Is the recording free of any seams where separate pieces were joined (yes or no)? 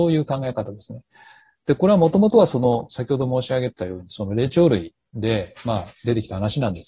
yes